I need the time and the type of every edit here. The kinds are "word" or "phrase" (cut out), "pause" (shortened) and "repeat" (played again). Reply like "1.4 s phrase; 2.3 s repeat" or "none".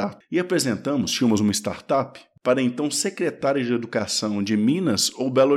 none